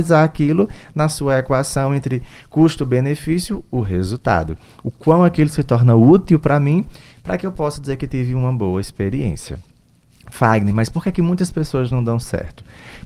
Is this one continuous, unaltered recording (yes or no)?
yes